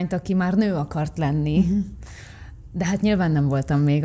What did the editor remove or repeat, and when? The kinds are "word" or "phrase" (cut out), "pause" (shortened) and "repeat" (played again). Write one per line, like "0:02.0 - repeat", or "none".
none